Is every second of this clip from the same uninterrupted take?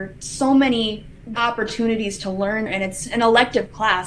no; 2 cuts; at 1.3 s, 2.7 s

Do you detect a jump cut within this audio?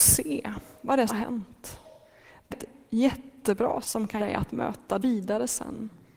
yes; 5 cuts; at 1.1 s, 2.5 s, 3.8 s, 4.2 s, 5.0 s

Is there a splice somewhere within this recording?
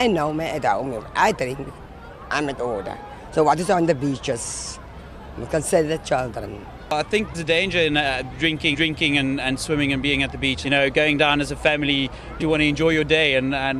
yes; 4 cuts; at 7.3 s, 8.7 s, 10.6 s, 12.4 s

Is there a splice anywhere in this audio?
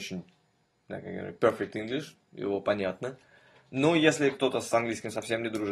no; 0 cuts

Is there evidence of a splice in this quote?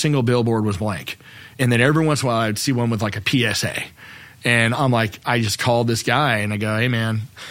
no; 0 cuts

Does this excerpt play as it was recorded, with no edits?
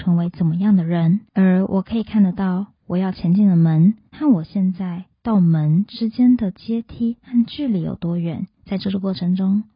no; 3 cuts; at 1.3 s, 4.1 s, 8.6 s

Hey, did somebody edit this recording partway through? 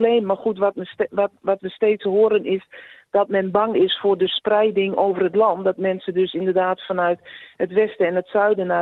no; 0 cuts

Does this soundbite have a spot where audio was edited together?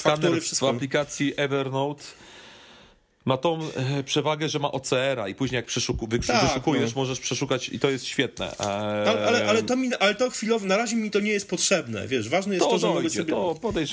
no; 0 cuts

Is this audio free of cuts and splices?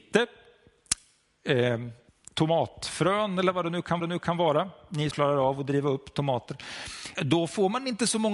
no; 4 cuts; at 2.1 s, 4.0 s, 5.1 s, 7.2 s

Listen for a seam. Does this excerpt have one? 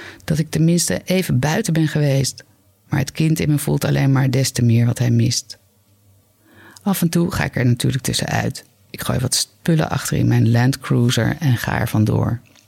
no; 0 cuts

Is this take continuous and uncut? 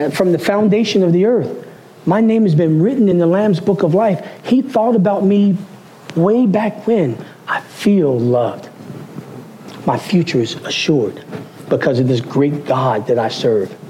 yes; 0 cuts

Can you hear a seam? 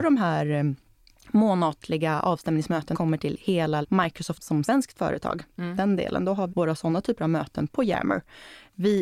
yes; 3 cuts; at 2.9 s, 3.8 s, 6.5 s

